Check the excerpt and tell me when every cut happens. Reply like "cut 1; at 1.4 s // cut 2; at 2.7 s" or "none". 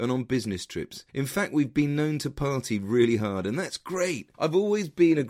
cut 1; at 1.1 s // cut 2; at 4.3 s